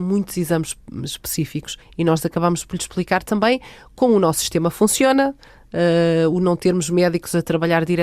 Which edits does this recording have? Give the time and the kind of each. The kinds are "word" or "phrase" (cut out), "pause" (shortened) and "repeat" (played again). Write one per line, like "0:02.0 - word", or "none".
none